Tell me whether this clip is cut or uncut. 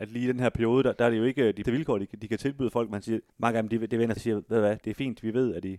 cut